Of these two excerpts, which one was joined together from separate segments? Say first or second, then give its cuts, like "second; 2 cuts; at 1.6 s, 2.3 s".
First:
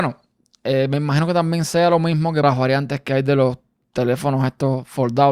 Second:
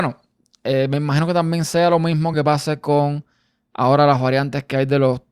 first; 1 cut; at 2.4 s